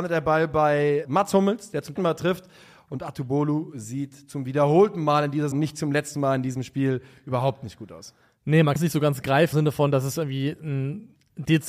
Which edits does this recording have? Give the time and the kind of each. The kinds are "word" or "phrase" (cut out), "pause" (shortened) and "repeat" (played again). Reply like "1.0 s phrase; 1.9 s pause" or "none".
1.0 s word; 2.0 s word; 5.5 s word; 8.8 s word; 9.5 s word